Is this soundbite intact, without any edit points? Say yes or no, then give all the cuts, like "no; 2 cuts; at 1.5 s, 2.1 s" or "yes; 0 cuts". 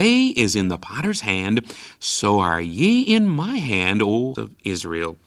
no; 1 cut; at 4.3 s